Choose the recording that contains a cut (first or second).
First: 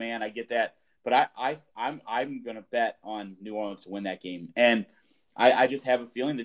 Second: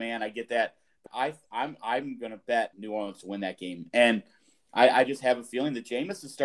second